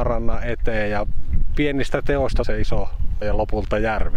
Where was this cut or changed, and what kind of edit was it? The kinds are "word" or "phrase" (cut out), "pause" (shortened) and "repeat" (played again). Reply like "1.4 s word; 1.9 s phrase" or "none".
1.5 s word; 2.4 s word; 3.2 s word